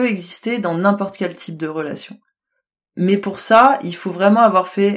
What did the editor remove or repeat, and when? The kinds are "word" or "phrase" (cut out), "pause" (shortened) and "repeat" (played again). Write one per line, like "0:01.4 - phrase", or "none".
none

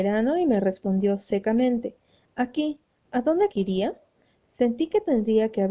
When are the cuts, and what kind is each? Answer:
0:03.5 - word

